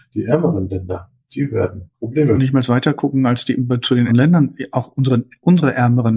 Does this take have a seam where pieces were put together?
yes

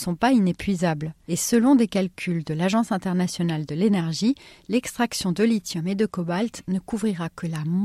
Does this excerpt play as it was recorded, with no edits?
yes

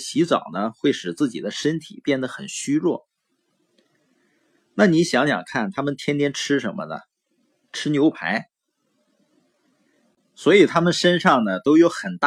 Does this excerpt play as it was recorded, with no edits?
yes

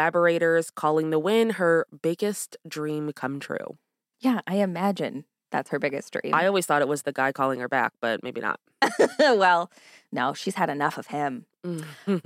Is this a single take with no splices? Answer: yes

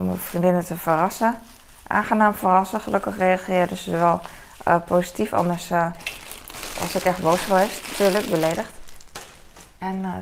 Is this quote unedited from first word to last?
yes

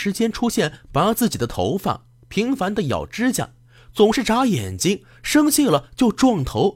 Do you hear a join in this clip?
no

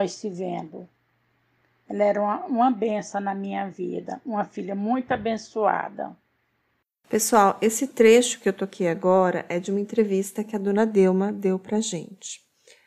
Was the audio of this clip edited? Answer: no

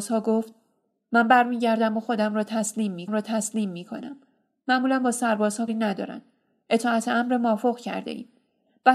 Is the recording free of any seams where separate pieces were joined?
no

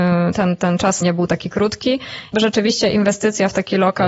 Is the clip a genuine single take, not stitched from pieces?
no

